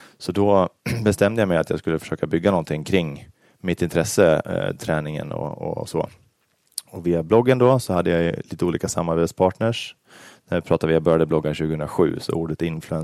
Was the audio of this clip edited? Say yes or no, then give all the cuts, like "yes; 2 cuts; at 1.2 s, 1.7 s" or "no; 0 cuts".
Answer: no; 0 cuts